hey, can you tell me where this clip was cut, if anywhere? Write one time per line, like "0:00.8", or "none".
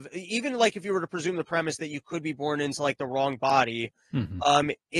none